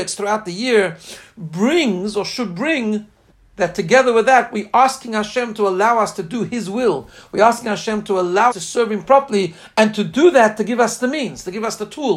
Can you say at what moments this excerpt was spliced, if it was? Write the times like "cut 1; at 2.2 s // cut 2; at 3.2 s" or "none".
cut 1; at 3.3 s // cut 2; at 8.5 s